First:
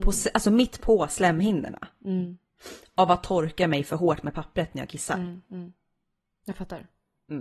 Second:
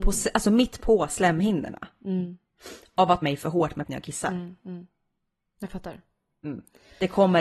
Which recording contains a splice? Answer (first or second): second